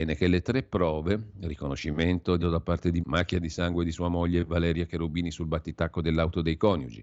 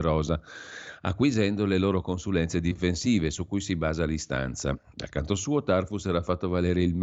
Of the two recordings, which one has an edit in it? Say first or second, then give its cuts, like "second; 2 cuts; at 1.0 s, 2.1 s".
first; 2 cuts; at 2.4 s, 3.0 s